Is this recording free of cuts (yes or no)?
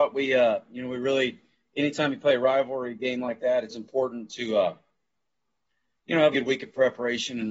no